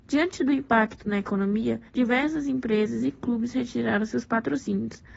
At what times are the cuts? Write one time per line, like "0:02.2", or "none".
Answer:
0:01.9

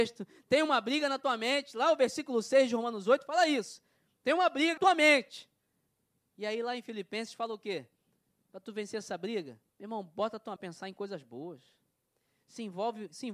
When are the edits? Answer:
0:04.8
0:09.7
0:10.6

